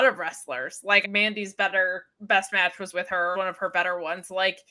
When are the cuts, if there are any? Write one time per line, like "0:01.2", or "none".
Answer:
0:01.0
0:02.9
0:03.3